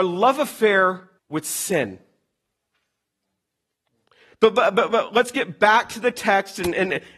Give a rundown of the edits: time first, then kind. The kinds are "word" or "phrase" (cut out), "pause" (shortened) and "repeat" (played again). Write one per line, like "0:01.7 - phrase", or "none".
0:01.2 - pause

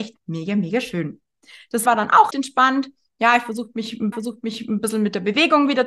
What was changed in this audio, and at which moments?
0:01.9 - word
0:02.3 - word
0:04.1 - repeat

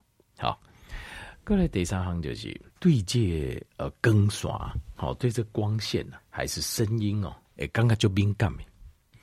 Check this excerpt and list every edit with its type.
0:02.7 - pause
0:03.7 - pause
0:06.2 - word
0:07.4 - pause

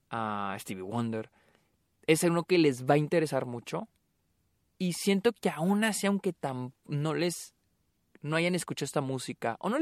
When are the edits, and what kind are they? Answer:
none

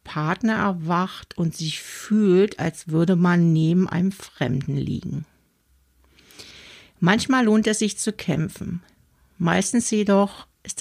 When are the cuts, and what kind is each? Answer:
none

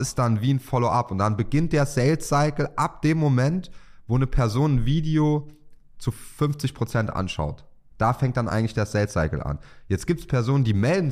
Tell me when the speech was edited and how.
none

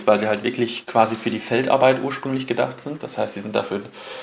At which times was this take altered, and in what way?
none

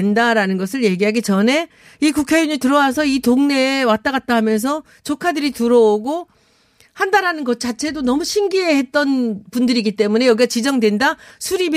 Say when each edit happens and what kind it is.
none

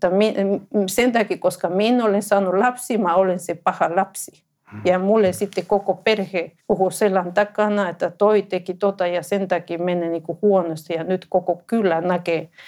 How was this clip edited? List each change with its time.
0:06.6 - pause

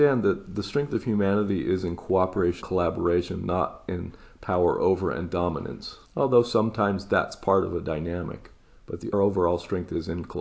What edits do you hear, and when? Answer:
0:02.6 - word
0:06.1 - pause
0:09.1 - word

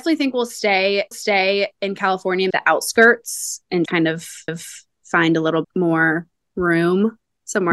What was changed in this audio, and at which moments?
0:01.1 - repeat
0:02.5 - phrase
0:03.9 - word
0:04.5 - repeat
0:05.6 - word

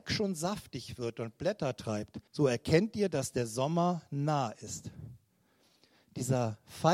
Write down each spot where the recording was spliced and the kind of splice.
0:02.3 - pause

